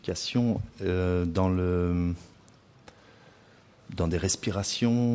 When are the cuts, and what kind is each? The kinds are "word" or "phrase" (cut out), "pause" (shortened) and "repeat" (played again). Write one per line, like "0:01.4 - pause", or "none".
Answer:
none